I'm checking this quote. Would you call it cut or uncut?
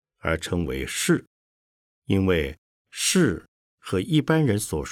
cut